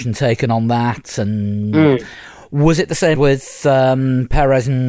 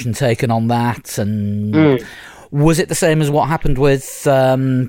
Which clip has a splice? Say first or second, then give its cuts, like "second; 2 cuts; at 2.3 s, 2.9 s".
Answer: first; 1 cut; at 3.1 s